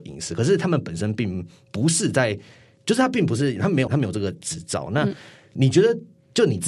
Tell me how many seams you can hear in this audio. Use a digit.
1